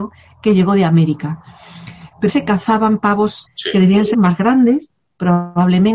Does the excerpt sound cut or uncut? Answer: cut